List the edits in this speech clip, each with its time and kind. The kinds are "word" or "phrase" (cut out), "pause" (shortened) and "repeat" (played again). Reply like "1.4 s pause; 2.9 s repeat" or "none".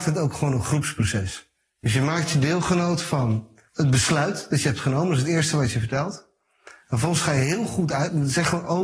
none